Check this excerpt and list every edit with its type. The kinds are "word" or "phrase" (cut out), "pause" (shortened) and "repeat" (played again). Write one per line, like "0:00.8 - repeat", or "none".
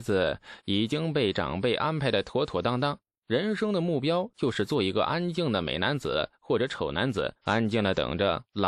0:07.4 - pause